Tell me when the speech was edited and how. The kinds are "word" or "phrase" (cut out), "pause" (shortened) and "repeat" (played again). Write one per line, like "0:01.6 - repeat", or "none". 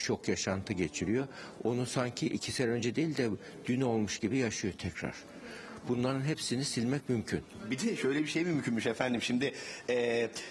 none